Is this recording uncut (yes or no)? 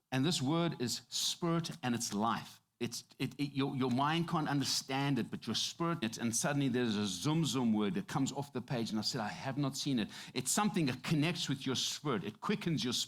no